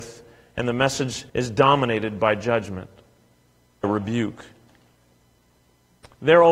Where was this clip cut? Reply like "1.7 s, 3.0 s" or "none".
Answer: 1.3 s, 3.8 s